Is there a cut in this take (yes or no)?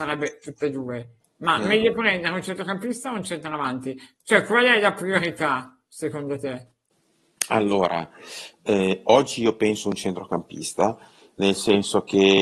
no